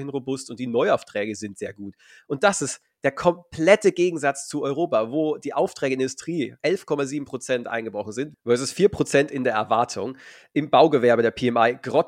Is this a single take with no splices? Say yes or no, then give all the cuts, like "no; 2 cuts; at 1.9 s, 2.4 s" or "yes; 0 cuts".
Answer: no; 1 cut; at 6.6 s